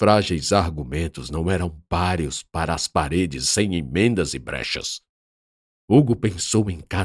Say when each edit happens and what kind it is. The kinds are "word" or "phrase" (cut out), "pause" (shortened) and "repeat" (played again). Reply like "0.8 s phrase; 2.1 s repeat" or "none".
none